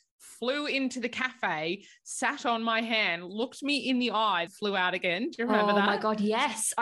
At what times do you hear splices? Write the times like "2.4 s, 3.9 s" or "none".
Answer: 4.5 s